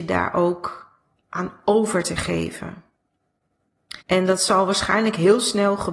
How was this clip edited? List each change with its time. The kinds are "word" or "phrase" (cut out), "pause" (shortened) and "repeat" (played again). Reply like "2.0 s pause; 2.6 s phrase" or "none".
4.0 s pause